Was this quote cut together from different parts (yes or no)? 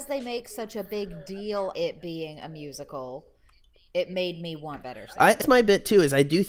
yes